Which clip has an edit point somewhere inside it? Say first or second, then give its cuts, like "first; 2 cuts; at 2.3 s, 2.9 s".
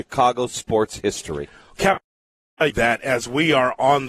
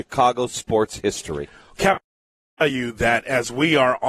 first; 1 cut; at 2.7 s